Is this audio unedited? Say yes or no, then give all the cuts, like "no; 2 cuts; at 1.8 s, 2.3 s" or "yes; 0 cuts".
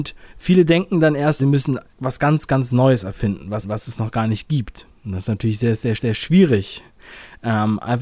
no; 4 cuts; at 1.4 s, 1.9 s, 3.6 s, 6.0 s